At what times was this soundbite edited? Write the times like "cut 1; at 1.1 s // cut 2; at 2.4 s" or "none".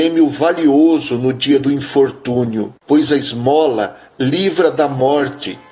cut 1; at 2.8 s

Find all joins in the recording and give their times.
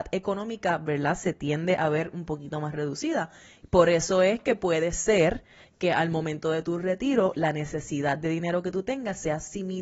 none

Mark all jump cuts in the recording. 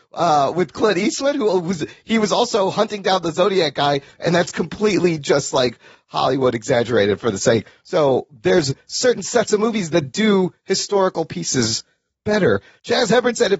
none

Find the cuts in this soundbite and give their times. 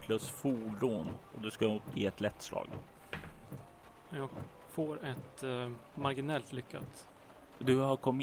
none

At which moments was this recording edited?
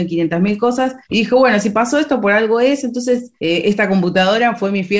cut 1; at 1.0 s // cut 2; at 3.4 s

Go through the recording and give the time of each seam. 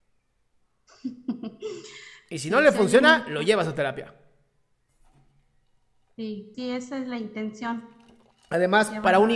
cut 1; at 6.5 s

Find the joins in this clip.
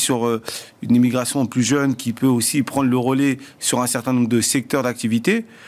none

